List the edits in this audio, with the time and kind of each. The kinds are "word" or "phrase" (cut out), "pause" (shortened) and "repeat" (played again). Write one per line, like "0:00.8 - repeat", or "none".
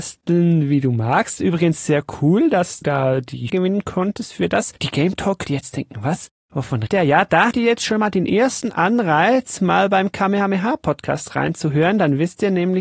0:02.8 - word
0:03.5 - word
0:04.8 - pause
0:05.4 - word
0:06.9 - word
0:07.5 - word